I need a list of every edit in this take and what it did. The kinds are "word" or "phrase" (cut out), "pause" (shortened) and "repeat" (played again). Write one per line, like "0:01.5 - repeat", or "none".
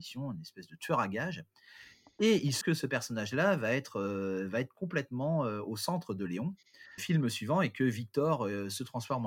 0:02.6 - word
0:07.0 - word